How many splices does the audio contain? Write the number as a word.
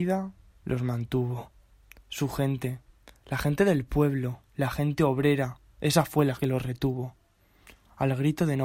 two